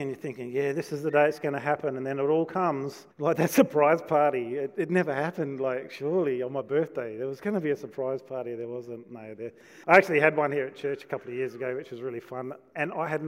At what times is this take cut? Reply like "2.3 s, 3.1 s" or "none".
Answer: 3.1 s, 9.8 s